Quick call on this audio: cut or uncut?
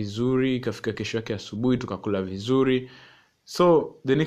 uncut